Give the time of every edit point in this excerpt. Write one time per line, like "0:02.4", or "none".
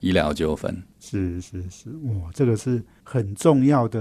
none